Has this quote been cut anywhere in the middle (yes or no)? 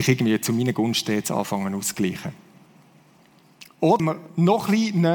yes